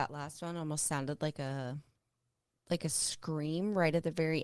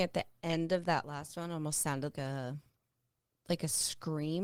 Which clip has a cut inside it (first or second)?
second